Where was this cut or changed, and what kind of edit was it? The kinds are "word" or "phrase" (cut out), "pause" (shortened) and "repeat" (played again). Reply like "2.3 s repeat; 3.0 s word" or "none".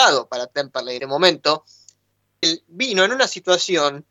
1.0 s word; 2.4 s word